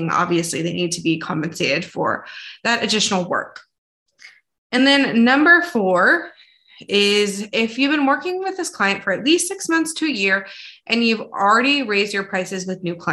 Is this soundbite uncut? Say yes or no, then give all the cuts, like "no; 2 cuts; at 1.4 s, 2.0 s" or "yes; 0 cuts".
yes; 0 cuts